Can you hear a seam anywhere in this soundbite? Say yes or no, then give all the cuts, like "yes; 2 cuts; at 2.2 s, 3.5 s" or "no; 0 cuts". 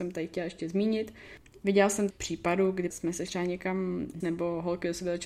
yes; 4 cuts; at 2.1 s, 2.9 s, 3.3 s, 4.2 s